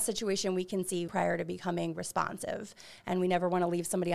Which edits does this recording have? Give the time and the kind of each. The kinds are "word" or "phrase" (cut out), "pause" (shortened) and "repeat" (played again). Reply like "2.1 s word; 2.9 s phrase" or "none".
1.1 s word